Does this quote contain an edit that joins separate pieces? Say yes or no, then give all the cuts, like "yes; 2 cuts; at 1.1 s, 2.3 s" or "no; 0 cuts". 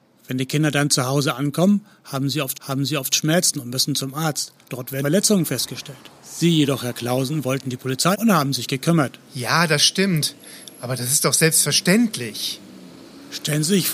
yes; 6 cuts; at 2.5 s, 4.6 s, 5.0 s, 6.1 s, 8.1 s, 9.2 s